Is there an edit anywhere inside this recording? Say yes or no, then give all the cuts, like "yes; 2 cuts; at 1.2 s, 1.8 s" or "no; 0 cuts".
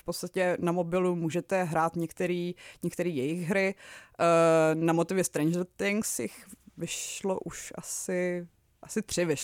no; 0 cuts